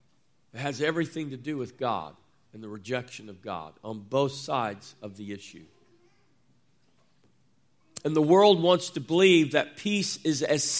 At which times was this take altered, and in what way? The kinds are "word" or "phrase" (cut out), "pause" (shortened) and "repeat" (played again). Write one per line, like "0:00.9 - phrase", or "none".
none